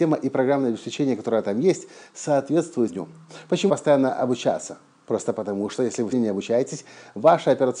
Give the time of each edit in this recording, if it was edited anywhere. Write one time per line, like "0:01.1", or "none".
0:02.9
0:03.7
0:06.1